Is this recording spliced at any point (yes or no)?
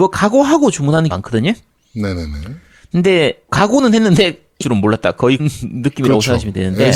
yes